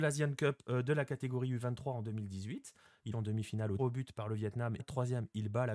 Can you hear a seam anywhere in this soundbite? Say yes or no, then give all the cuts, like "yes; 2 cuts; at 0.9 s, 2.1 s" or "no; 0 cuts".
yes; 3 cuts; at 3.1 s, 3.8 s, 4.8 s